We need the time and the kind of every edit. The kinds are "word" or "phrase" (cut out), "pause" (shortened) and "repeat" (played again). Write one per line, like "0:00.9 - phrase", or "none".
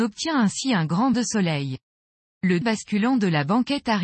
0:01.1 - word
0:02.6 - word